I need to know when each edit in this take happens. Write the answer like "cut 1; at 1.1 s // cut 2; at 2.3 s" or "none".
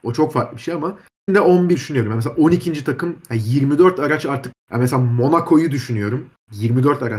cut 1; at 1.3 s // cut 2; at 1.7 s // cut 3; at 4.5 s